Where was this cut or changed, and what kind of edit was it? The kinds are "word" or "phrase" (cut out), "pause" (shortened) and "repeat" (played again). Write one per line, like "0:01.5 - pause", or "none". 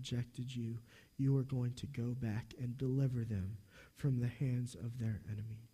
none